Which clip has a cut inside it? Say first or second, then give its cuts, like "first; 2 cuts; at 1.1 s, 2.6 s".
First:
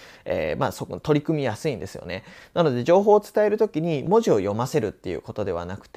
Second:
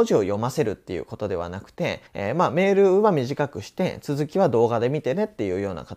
second; 1 cut; at 2.1 s